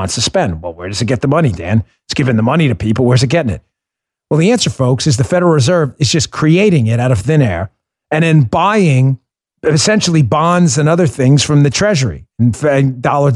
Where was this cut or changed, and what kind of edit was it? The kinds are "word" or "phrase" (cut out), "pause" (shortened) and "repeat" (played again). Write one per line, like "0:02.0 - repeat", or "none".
0:09.3 - pause